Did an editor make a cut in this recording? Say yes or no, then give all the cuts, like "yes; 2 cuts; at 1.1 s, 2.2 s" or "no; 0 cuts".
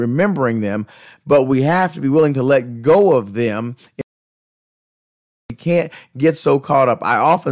no; 0 cuts